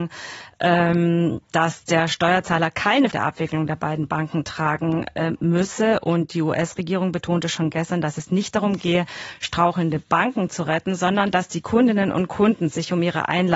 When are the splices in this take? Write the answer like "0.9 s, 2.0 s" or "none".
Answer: 3.1 s